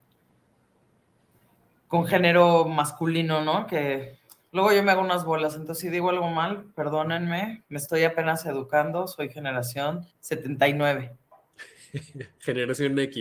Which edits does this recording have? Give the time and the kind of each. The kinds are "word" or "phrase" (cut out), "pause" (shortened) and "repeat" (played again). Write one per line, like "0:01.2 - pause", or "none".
0:10.1 - pause

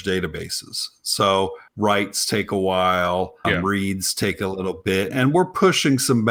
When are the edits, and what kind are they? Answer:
0:01.7 - pause
0:03.4 - word
0:05.1 - word

